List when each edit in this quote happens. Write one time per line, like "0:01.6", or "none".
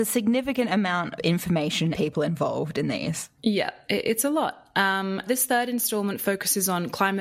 0:01.2
0:01.9
0:03.4
0:05.3